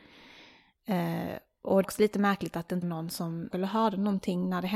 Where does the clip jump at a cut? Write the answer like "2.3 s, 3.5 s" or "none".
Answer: 1.8 s, 2.8 s, 3.5 s